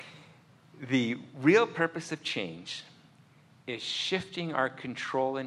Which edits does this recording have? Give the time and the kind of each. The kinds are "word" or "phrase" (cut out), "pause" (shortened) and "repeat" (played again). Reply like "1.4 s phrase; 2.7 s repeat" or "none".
none